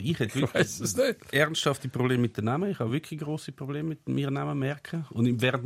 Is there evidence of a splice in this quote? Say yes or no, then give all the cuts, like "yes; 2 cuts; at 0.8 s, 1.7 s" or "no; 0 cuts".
no; 0 cuts